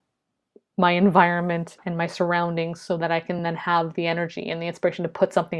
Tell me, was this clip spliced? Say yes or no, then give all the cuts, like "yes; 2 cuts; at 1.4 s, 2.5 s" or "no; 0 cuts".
no; 0 cuts